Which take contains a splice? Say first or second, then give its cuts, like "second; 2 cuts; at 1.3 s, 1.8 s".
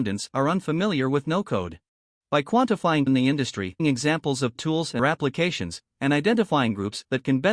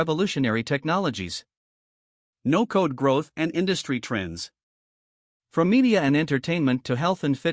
first; 5 cuts; at 1.9 s, 3.1 s, 3.8 s, 4.6 s, 5.0 s